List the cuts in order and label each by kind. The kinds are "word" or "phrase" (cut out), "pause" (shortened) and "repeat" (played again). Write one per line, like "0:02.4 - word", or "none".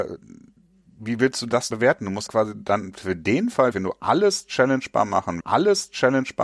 0:01.7 - word
0:02.3 - word
0:03.7 - word
0:05.4 - repeat